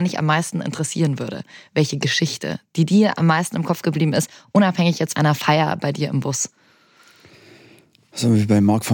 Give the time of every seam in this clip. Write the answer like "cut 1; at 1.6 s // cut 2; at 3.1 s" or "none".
cut 1; at 5.1 s